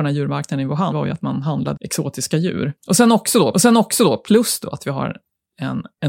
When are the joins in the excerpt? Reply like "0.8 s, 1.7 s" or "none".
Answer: 0.9 s, 1.8 s, 2.8 s, 3.5 s